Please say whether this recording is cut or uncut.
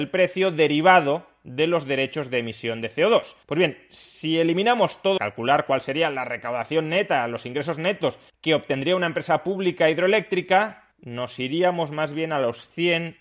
cut